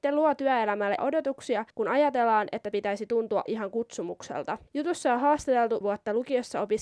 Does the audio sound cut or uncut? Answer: cut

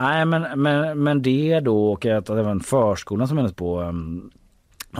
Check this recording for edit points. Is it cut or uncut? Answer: cut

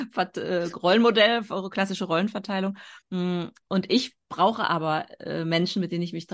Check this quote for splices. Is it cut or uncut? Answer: cut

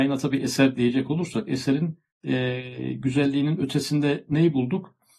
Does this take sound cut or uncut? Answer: uncut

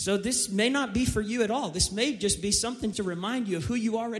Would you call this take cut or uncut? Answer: cut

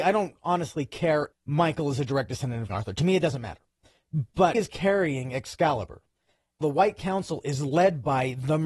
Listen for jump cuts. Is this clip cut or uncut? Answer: cut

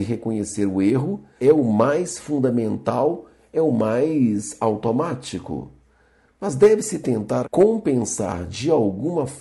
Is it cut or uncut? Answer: uncut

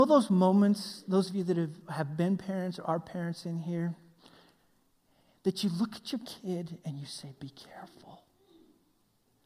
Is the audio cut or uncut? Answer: uncut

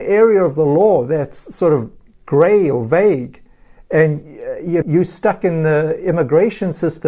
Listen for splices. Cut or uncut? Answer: cut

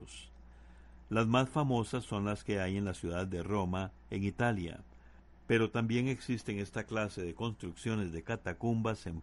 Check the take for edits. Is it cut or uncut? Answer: uncut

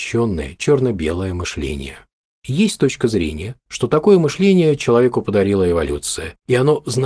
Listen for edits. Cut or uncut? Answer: uncut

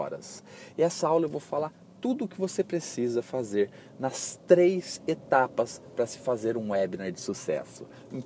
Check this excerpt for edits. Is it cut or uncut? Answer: uncut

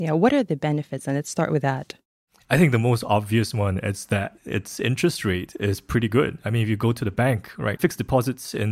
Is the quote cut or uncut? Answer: cut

